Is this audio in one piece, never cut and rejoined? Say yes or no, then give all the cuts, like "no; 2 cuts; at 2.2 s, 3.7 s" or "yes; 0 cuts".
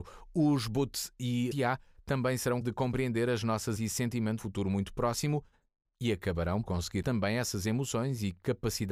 no; 6 cuts; at 1.5 s, 2.6 s, 3.8 s, 4.4 s, 6.6 s, 7.0 s